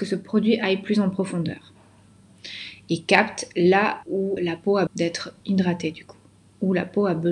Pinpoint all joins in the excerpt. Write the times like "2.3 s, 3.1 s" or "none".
4.0 s, 4.4 s, 4.9 s